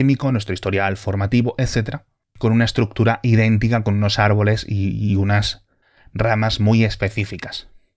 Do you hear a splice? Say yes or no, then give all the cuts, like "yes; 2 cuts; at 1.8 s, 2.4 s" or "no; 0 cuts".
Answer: no; 0 cuts